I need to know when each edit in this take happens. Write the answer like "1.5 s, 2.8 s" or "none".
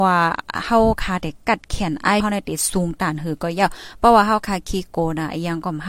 2.2 s